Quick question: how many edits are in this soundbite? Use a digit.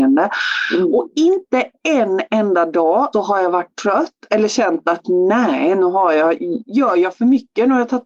1